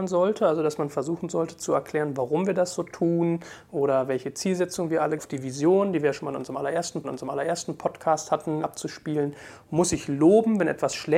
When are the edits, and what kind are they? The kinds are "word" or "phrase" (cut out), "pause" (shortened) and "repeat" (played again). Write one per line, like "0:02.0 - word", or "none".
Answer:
0:05.2 - phrase
0:07.0 - repeat